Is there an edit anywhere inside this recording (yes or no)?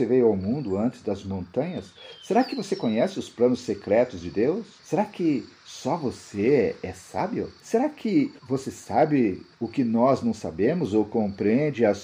yes